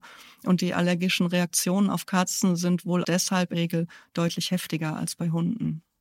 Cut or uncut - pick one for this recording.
cut